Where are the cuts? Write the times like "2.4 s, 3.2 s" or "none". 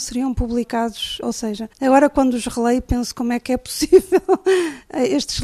1.2 s, 1.7 s